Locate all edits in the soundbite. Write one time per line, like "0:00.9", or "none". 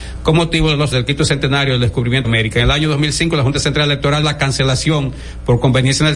0:00.9
0:02.2
0:04.2